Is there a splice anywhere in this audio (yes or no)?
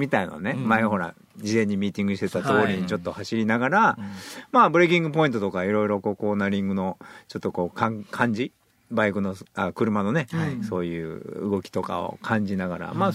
no